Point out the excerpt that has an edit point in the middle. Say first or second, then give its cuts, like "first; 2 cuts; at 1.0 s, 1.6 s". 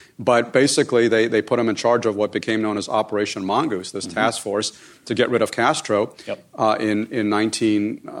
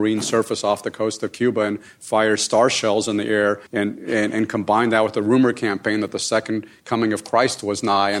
second; 1 cut; at 3.7 s